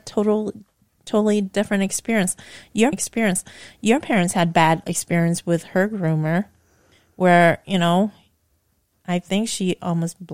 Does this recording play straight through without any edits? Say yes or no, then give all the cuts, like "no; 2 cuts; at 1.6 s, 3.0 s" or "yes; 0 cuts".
no; 2 cuts; at 2.9 s, 4.8 s